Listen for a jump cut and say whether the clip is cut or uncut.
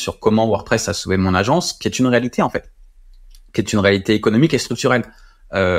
uncut